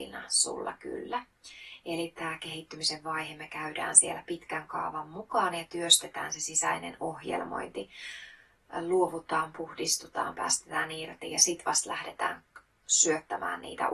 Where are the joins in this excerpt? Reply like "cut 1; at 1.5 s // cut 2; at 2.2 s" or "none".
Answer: none